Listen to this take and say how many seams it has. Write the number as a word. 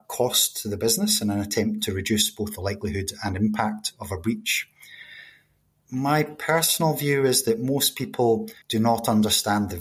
one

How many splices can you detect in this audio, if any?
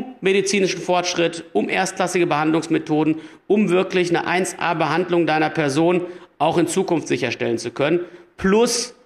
zero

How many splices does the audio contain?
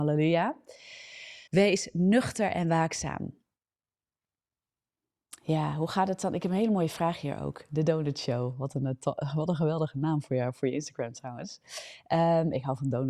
one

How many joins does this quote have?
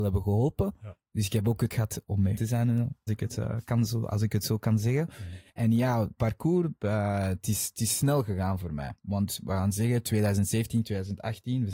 seven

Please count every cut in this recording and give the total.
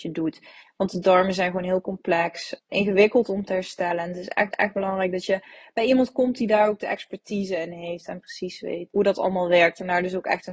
three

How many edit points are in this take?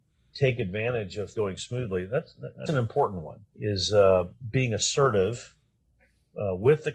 three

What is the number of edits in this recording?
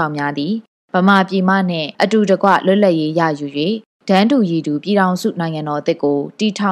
one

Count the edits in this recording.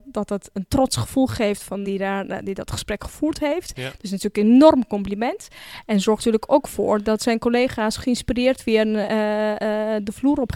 two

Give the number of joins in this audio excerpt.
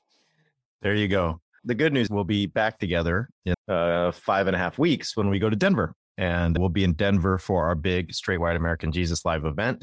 three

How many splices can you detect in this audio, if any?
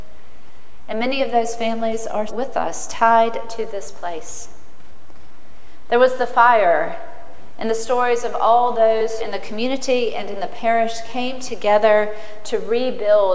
two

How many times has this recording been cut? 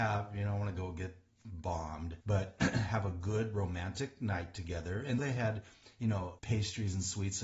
three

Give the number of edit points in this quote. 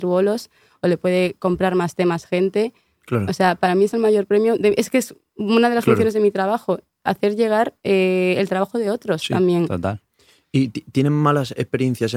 zero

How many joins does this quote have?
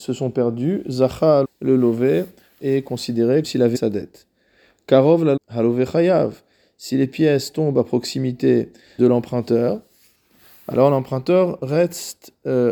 six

